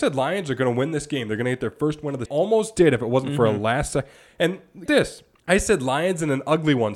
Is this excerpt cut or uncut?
cut